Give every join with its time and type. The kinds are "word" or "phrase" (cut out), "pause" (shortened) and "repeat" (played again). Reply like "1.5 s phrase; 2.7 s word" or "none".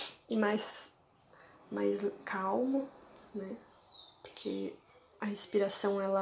none

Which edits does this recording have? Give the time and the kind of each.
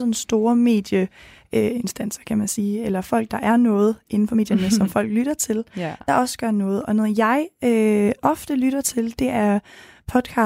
none

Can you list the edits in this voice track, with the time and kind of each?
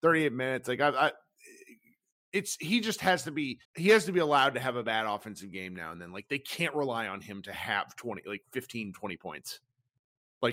3.6 s pause

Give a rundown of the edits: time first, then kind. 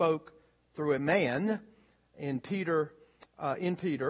none

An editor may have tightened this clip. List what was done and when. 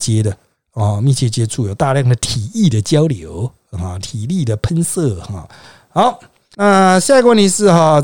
none

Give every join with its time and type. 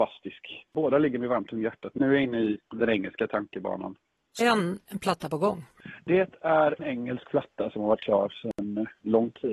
2.0 s word; 2.7 s pause; 4.4 s word; 6.8 s word

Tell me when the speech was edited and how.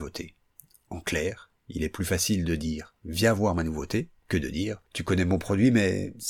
4.2 s pause; 4.9 s pause

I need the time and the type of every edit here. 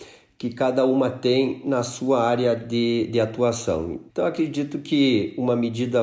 4.1 s pause

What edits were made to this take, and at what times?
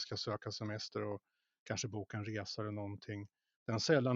none

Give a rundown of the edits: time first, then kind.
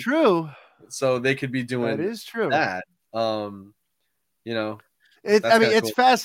none

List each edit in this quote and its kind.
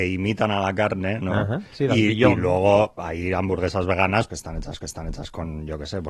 4.3 s word; 4.8 s repeat

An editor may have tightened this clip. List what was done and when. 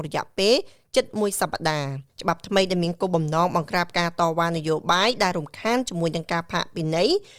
2.1 s pause

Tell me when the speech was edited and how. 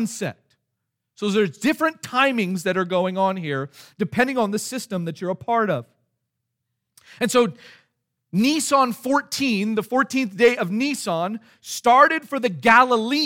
none

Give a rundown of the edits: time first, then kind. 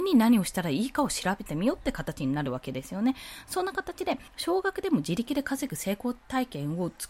4.3 s pause

